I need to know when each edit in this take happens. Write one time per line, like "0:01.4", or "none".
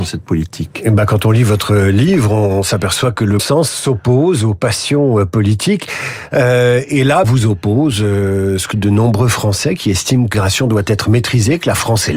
0:03.4
0:07.2
0:08.7
0:10.3

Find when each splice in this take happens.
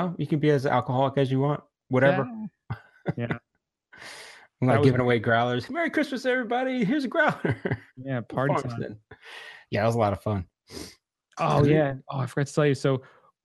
none

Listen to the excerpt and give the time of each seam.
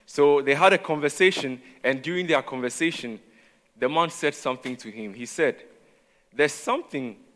none

